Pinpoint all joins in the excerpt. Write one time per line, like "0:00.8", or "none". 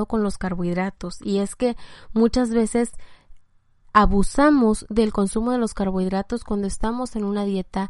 none